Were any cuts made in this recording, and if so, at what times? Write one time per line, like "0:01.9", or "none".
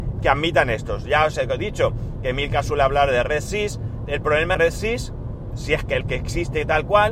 0:04.1
0:04.5
0:06.0